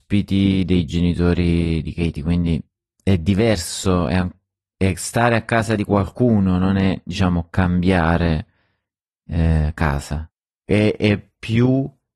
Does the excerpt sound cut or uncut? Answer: uncut